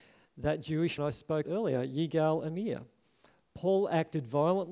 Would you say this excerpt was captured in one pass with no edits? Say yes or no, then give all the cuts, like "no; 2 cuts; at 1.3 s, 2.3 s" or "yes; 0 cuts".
no; 2 cuts; at 1.0 s, 1.4 s